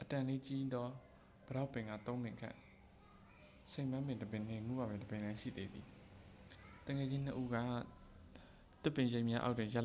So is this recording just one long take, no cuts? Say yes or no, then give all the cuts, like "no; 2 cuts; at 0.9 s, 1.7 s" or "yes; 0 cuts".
yes; 0 cuts